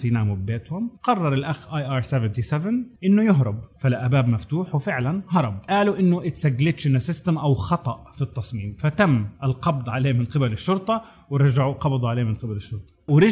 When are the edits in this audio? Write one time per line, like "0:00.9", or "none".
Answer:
0:01.0
0:03.0